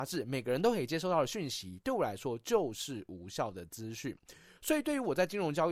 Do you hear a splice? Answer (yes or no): no